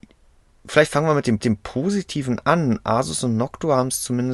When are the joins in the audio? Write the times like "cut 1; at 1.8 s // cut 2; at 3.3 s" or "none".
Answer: cut 1; at 1.4 s